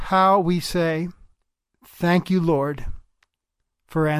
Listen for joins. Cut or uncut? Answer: uncut